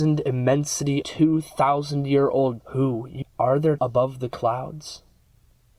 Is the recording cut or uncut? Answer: cut